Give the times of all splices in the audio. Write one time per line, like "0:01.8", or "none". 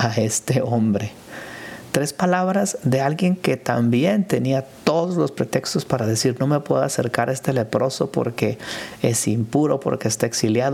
none